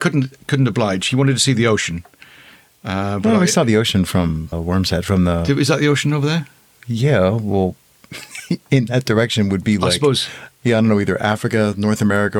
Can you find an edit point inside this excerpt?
yes; 1 cut; at 4.5 s

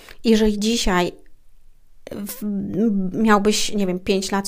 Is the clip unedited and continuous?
yes; 0 cuts

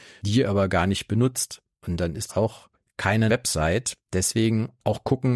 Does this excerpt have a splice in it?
yes; 2 cuts; at 2.3 s, 3.3 s

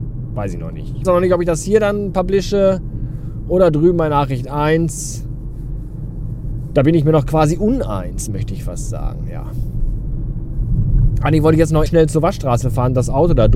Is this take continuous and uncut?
no; 2 cuts; at 1.0 s, 11.9 s

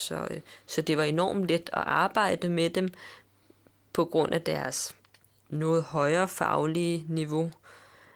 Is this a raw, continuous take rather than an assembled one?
yes; 0 cuts

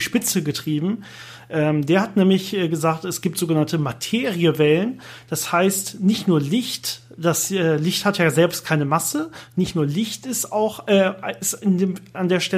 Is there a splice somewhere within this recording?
no; 0 cuts

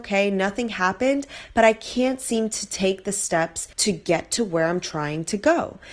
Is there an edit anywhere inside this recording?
yes; 1 cut; at 3.7 s

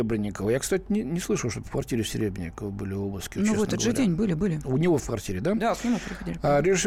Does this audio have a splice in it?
no; 0 cuts

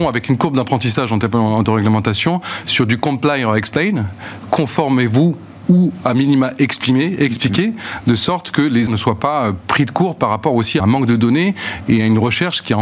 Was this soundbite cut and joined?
yes; 3 cuts; at 1.6 s, 8.9 s, 10.8 s

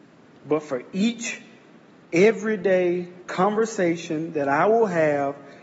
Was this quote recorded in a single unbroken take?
no; 1 cut; at 3.2 s

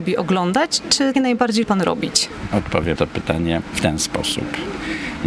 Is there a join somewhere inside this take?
yes; 3 cuts; at 1.1 s, 1.6 s, 3.0 s

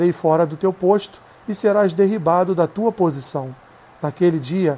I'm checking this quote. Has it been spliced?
no; 0 cuts

